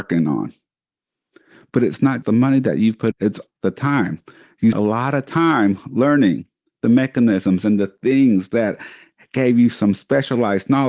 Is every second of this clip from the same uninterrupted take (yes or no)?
no